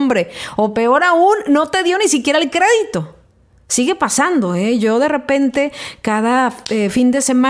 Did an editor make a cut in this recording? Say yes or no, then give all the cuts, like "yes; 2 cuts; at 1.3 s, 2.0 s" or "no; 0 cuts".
no; 0 cuts